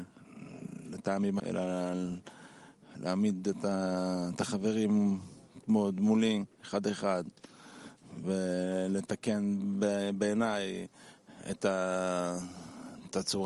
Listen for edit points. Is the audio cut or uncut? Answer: cut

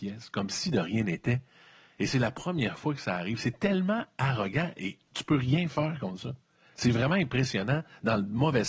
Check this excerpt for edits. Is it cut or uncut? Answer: uncut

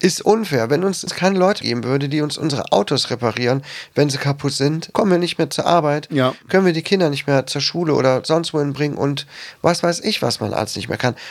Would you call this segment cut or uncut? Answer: cut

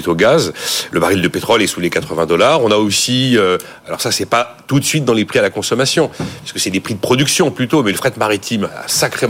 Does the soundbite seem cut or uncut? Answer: uncut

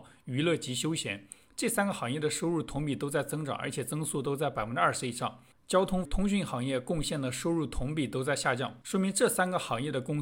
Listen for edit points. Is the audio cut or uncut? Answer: cut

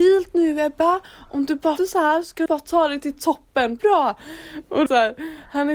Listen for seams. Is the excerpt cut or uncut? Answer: cut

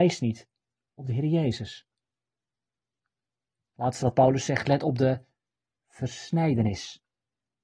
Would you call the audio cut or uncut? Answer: uncut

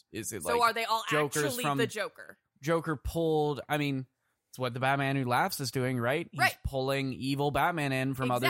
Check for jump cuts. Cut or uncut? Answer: uncut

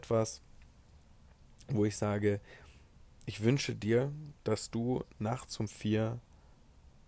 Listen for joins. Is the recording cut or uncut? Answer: cut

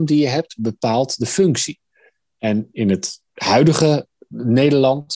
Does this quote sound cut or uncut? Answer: uncut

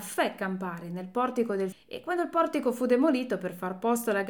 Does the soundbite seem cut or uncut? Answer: cut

